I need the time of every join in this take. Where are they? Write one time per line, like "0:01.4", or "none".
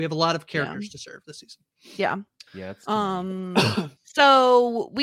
0:02.5
0:04.0